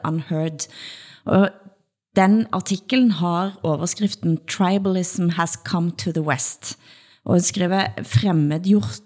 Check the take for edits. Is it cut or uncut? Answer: uncut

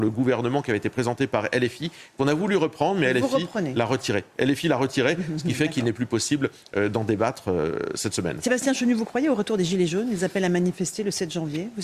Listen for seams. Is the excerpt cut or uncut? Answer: uncut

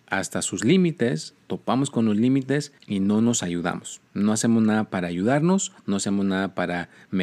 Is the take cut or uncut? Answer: cut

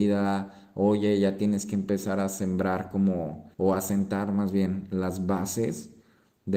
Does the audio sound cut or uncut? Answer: cut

